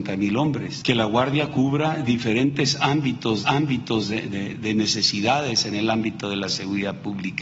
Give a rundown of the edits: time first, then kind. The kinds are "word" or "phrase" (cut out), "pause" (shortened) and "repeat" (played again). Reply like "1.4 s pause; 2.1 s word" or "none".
3.4 s repeat; 4.5 s word